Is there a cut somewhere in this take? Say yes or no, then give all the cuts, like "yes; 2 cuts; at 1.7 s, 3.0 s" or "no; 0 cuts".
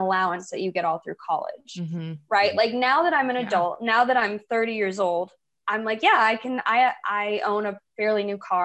no; 0 cuts